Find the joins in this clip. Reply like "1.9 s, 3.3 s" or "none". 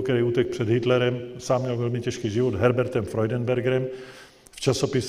none